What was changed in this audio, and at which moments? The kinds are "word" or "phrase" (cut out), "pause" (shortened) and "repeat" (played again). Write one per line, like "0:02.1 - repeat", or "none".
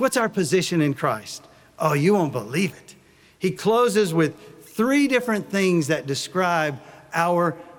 none